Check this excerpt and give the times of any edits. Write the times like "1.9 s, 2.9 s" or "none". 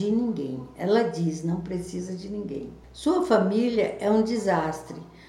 2.8 s